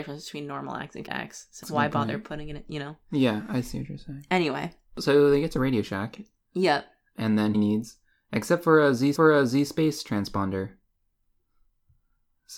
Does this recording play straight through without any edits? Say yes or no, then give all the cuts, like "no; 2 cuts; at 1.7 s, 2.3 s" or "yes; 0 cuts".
no; 4 cuts; at 1.1 s, 1.6 s, 7.5 s, 9.2 s